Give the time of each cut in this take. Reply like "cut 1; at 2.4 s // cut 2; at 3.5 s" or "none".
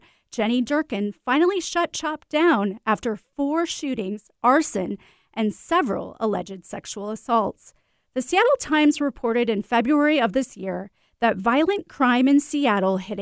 none